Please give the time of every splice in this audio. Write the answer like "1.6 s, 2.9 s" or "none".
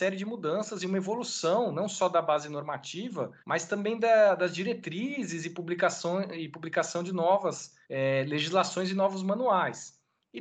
3.4 s, 7.8 s